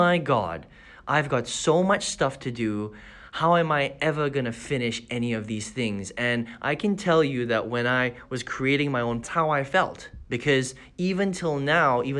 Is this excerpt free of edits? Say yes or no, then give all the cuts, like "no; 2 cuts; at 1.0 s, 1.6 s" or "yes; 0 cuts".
no; 1 cut; at 9.2 s